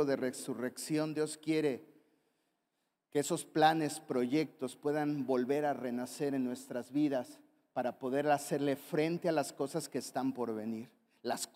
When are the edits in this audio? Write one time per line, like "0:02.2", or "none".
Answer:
none